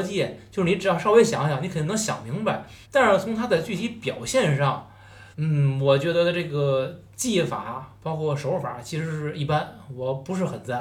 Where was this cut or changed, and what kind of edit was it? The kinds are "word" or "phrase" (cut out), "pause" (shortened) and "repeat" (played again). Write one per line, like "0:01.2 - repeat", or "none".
0:02.8 - pause
0:05.3 - pause